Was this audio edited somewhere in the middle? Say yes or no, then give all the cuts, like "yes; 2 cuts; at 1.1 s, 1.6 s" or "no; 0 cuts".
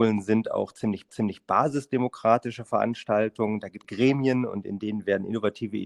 yes; 2 cuts; at 1.1 s, 3.8 s